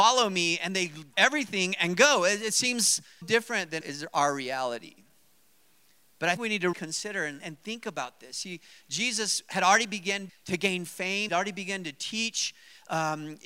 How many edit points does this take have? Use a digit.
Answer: 8